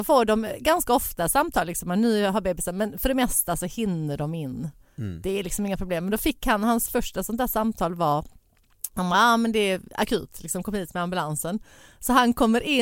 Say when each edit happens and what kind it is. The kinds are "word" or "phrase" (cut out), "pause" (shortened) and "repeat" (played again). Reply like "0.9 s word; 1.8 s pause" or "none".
none